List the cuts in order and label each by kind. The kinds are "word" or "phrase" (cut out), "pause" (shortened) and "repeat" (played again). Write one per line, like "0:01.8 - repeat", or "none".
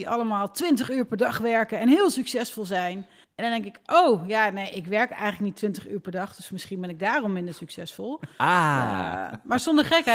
0:03.2 - pause
0:08.3 - pause